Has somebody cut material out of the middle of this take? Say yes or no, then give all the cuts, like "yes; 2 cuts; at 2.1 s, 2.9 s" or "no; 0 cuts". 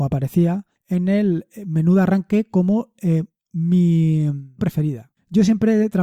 yes; 1 cut; at 4.6 s